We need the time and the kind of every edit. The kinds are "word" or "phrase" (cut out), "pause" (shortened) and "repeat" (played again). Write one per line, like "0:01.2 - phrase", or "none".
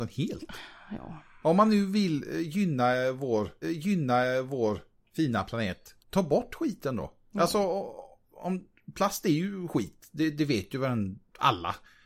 0:03.6 - repeat
0:06.0 - pause